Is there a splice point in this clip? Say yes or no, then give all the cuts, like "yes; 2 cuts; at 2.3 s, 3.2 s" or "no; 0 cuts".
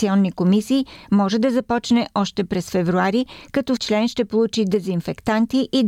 yes; 1 cut; at 3.8 s